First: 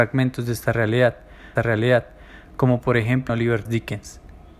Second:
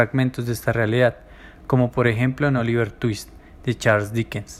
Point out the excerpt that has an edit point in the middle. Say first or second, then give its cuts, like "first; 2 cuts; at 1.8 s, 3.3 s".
first; 3 cuts; at 1.6 s, 3.3 s, 3.7 s